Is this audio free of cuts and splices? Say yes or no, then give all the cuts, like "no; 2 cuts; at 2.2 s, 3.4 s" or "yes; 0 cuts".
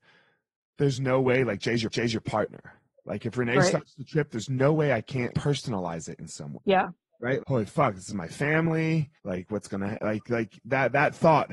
no; 5 cuts; at 1.9 s, 5.3 s, 6.6 s, 7.4 s, 9.2 s